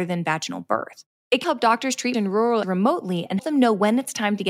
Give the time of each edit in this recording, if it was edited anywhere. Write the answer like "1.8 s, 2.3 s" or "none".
1.4 s, 2.1 s, 2.6 s, 3.4 s